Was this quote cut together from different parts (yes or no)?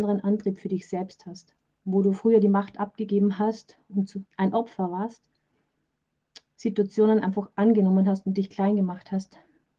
no